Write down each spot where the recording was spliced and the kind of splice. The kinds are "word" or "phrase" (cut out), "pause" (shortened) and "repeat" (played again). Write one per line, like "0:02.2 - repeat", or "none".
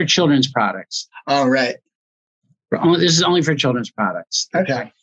none